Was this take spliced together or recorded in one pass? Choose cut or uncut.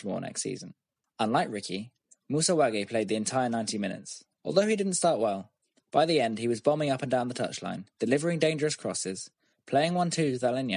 cut